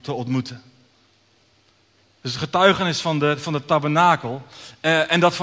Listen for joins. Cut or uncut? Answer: uncut